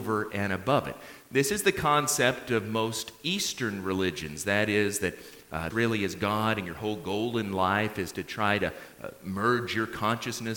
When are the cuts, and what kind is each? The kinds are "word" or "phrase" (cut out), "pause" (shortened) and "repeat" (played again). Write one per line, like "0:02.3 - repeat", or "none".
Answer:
0:05.7 - phrase